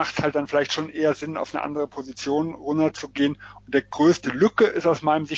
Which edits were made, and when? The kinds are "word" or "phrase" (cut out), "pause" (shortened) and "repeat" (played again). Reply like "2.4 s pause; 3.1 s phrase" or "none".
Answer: none